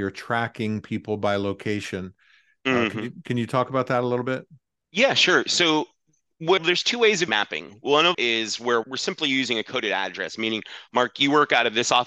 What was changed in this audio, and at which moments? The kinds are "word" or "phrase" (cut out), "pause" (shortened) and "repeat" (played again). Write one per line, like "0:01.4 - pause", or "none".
0:06.6 - word
0:07.3 - word
0:08.1 - word
0:08.8 - word